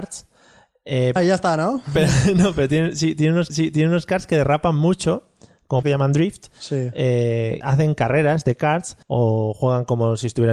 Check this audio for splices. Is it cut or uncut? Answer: cut